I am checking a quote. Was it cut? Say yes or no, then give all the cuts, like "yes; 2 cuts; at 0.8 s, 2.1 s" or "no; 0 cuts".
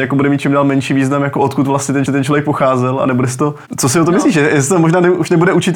yes; 1 cut; at 2.1 s